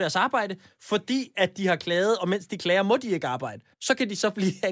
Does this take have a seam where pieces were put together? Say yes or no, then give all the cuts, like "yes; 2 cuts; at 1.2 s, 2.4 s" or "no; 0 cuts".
yes; 1 cut; at 3.7 s